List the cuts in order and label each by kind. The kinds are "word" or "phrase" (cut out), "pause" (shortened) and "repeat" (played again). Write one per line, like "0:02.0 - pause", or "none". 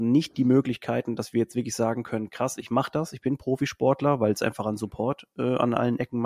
none